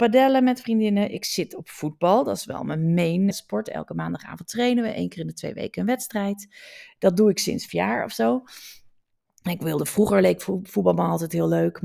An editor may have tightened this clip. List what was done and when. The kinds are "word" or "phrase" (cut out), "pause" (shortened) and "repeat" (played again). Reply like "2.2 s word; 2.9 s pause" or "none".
3.3 s word; 7.7 s word